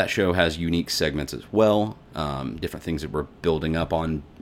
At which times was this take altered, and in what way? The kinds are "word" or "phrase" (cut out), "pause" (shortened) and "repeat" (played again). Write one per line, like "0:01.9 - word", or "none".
none